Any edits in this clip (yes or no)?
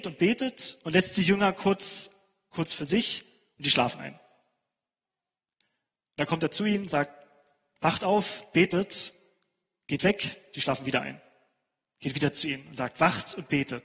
no